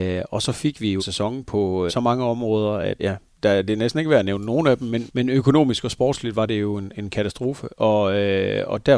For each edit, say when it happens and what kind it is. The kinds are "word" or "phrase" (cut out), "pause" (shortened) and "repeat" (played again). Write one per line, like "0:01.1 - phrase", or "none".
0:01.0 - phrase
0:01.9 - word
0:03.0 - word
0:05.1 - word

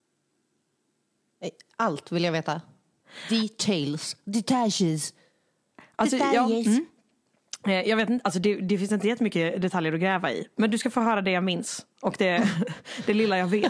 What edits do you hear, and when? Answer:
none

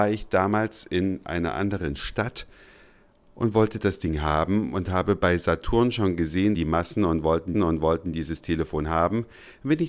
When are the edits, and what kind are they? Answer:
0:06.6 - phrase
0:07.5 - repeat

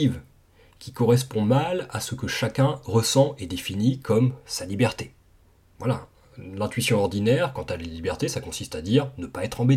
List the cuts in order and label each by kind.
none

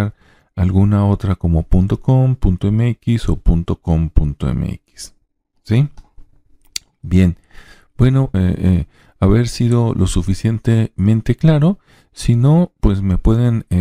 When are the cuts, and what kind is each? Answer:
0:08.3 - word

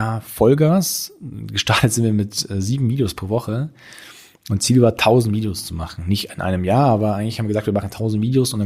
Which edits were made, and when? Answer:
none

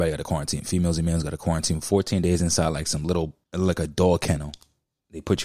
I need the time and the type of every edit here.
0:03.4 - pause

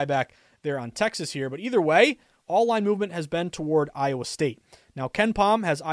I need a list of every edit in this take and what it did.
none

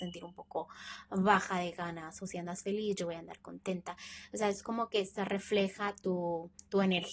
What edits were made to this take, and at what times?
none

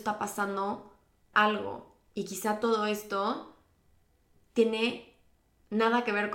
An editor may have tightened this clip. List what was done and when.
0:01.3 - word

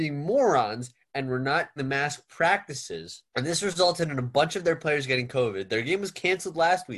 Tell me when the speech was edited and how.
0:01.8 - word
0:03.3 - pause

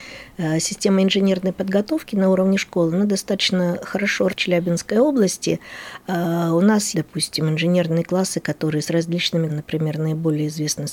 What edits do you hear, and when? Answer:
0:04.3 - word
0:06.9 - word
0:09.5 - word

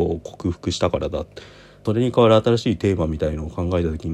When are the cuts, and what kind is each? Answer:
none

